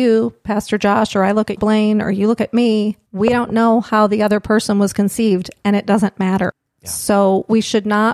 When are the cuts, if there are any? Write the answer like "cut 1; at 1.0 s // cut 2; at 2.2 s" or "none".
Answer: cut 1; at 1.6 s // cut 2; at 3.0 s